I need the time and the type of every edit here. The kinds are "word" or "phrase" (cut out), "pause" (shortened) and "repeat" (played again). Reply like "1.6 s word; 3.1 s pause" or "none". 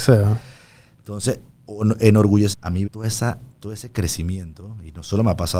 2.5 s word; 2.9 s word; 3.5 s pause